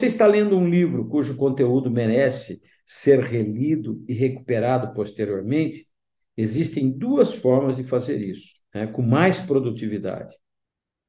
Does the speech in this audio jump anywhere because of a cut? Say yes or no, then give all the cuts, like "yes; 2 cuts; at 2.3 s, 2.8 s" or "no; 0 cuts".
yes; 1 cut; at 8.7 s